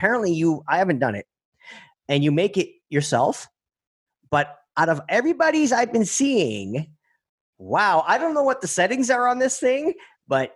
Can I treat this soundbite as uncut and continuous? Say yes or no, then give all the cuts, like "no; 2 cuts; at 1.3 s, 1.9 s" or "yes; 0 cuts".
yes; 0 cuts